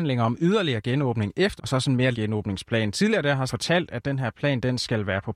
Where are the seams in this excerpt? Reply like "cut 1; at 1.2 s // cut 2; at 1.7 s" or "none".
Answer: cut 1; at 1.6 s // cut 2; at 2.1 s // cut 3; at 3.5 s